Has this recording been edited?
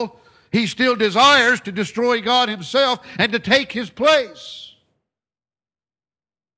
no; 0 cuts

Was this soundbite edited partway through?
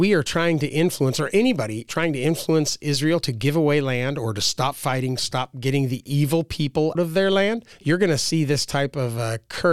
yes; 2 cuts; at 1.9 s, 6.9 s

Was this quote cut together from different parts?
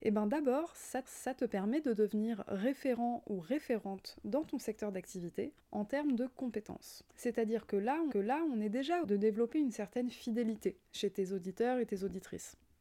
yes; 6 cuts; at 1.0 s, 5.6 s, 7.1 s, 8.1 s, 9.0 s, 10.9 s

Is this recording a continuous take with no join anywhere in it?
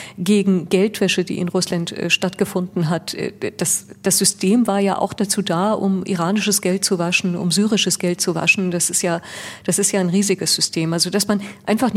yes; 0 cuts

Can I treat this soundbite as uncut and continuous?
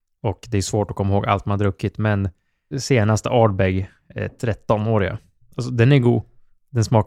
no; 1 cut; at 2.7 s

